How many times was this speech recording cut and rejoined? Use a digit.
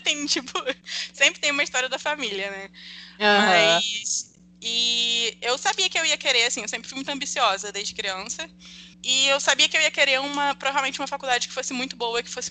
1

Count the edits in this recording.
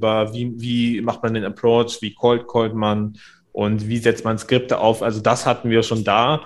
0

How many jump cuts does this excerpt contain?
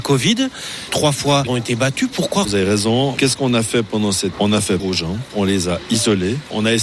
4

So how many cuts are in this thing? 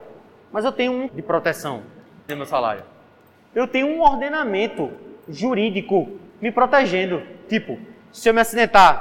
4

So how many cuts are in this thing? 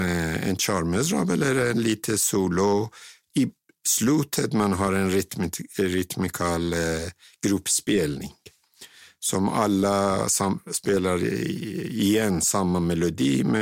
0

